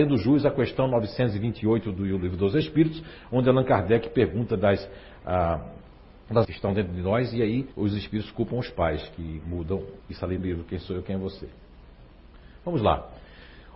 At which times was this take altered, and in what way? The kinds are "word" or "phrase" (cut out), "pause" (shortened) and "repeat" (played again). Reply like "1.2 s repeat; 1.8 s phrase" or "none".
6.4 s phrase; 7.7 s pause; 10.0 s pause; 10.4 s phrase

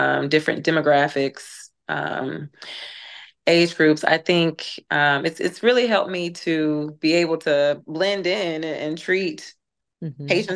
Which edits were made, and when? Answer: none

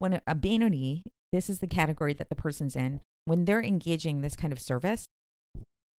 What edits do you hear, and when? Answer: none

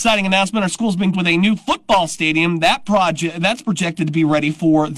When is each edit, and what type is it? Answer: 1.1 s word

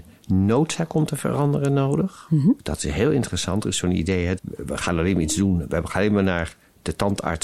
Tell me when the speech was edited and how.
4.4 s word

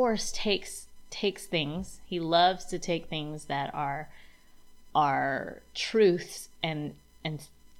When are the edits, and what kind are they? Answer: none

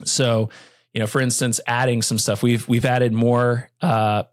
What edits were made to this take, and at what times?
none

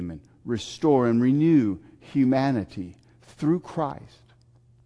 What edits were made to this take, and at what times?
none

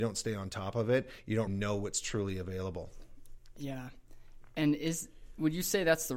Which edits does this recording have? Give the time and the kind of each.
1.5 s word

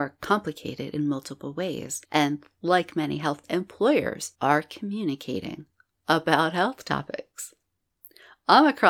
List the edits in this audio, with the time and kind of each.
2.0 s pause; 3.4 s word; 4.4 s pause; 5.9 s pause

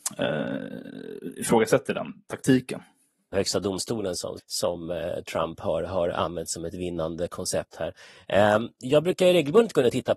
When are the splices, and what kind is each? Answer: 3.3 s phrase; 4.4 s word

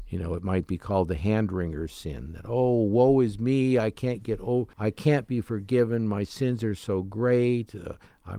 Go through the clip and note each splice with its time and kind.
4.7 s pause

